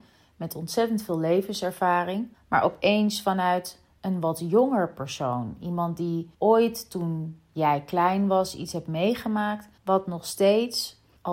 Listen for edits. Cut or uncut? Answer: cut